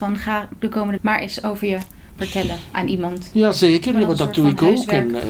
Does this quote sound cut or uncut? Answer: cut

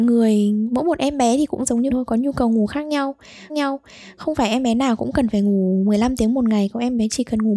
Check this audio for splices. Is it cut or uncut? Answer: cut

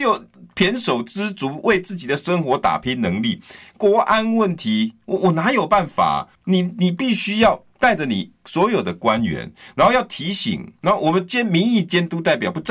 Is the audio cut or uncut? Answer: cut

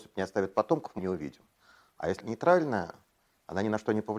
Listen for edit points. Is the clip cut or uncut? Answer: cut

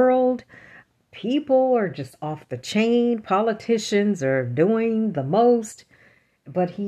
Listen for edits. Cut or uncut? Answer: uncut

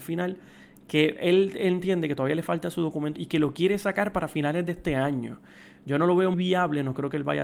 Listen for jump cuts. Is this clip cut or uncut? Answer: cut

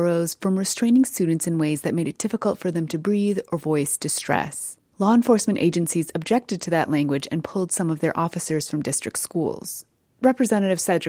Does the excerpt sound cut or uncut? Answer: uncut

